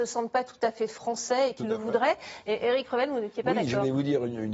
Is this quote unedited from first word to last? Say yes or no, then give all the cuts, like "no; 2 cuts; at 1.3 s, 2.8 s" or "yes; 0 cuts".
yes; 0 cuts